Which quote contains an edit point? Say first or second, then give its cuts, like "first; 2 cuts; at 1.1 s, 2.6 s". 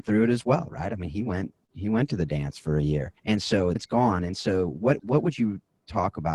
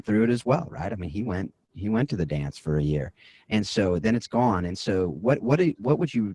first; 3 cuts; at 3.2 s, 3.8 s, 5.0 s